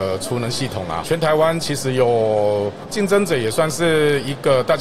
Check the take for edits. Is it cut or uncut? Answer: cut